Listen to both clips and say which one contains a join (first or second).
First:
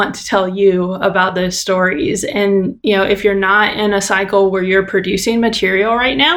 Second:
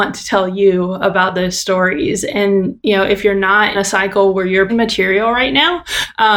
second